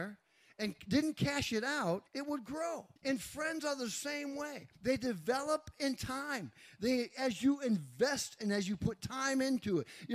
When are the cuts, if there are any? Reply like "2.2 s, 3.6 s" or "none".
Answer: 2.1 s, 3.0 s, 4.7 s